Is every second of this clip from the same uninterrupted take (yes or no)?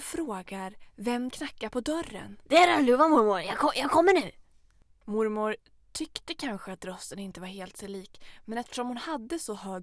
no